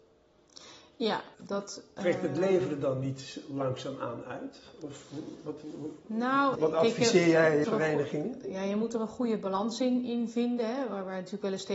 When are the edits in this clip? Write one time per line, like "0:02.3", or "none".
0:01.3
0:06.5
0:07.6